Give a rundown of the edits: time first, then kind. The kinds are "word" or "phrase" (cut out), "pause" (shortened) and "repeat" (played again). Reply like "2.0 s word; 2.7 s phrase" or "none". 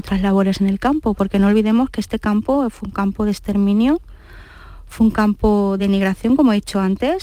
5.8 s word